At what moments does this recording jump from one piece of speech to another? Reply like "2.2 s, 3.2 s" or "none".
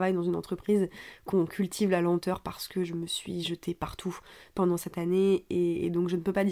none